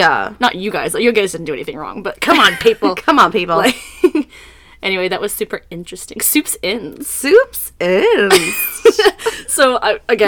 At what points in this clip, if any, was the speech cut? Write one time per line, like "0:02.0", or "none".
none